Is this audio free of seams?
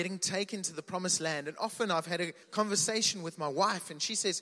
no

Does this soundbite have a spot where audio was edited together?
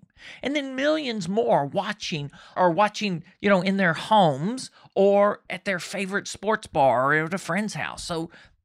yes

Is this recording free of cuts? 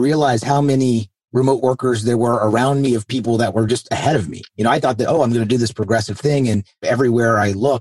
yes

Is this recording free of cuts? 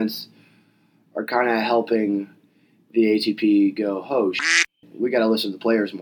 yes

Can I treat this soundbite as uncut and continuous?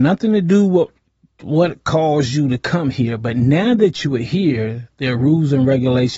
yes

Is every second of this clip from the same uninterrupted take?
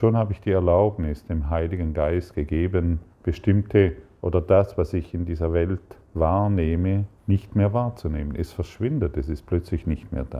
no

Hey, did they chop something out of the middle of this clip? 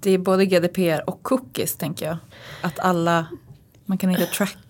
no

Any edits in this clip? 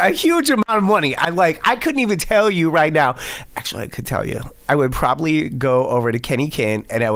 no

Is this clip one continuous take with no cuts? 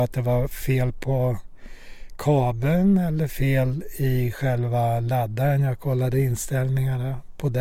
yes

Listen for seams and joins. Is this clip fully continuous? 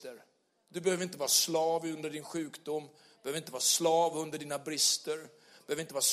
yes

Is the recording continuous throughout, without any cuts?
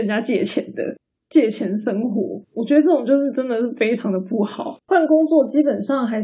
no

